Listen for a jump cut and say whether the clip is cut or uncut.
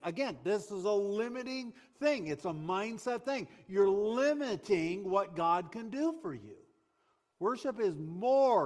uncut